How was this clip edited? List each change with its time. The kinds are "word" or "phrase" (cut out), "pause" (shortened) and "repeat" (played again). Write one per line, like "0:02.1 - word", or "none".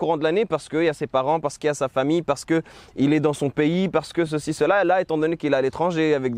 none

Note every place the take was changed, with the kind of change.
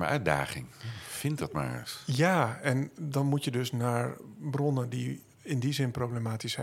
0:05.3 - pause

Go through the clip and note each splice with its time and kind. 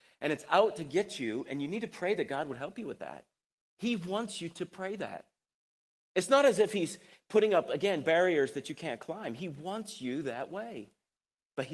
none

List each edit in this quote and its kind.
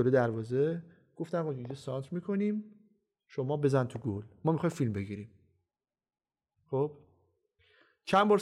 none

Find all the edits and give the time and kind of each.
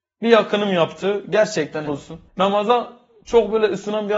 0:01.9 - word
0:02.3 - pause

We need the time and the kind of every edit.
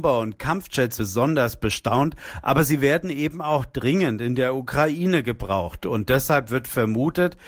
0:01.0 - word

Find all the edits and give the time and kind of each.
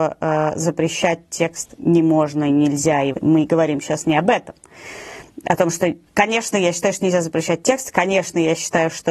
0:03.1 - word

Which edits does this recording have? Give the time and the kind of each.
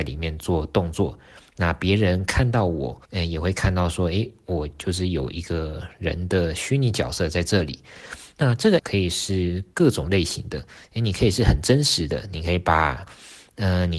0:03.0 - pause
0:08.8 - phrase

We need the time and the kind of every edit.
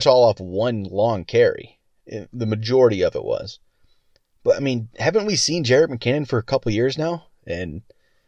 none

